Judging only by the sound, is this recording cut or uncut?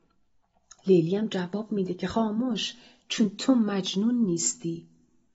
uncut